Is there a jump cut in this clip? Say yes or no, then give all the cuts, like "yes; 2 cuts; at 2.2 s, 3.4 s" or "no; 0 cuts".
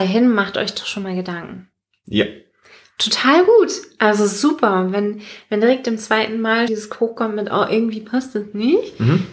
yes; 1 cut; at 6.7 s